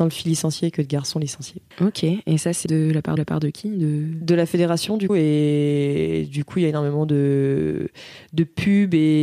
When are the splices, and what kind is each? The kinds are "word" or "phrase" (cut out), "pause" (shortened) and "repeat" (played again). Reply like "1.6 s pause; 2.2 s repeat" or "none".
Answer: 1.7 s pause; 2.7 s phrase; 3.2 s repeat; 5.1 s word